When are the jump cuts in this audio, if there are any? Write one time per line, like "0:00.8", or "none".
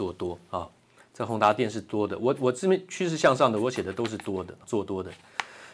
0:04.6